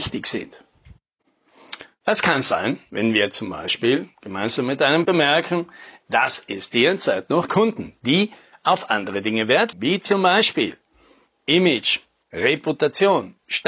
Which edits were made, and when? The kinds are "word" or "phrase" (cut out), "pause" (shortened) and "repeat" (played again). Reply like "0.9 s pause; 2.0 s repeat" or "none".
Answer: 5.0 s word; 7.5 s phrase; 9.7 s word